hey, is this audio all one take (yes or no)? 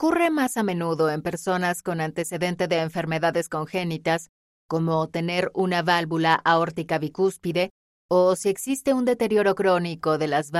yes